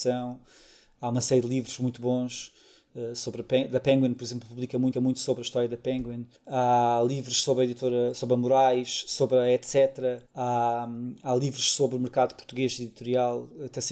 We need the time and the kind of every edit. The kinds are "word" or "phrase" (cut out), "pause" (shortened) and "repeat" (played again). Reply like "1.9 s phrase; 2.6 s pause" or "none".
4.9 s repeat; 6.4 s pause; 10.3 s pause